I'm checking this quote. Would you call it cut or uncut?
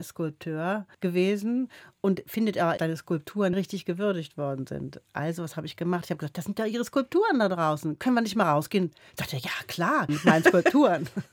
cut